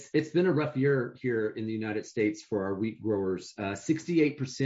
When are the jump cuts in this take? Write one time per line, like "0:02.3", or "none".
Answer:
none